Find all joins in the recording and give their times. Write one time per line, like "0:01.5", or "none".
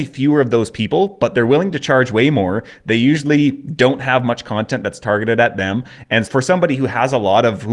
0:06.3